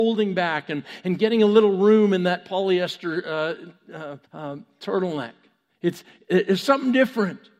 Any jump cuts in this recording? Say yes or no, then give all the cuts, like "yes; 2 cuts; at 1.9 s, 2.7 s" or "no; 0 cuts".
yes; 2 cuts; at 4.3 s, 5.7 s